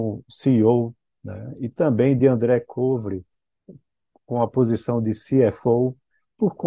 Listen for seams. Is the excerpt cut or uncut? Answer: uncut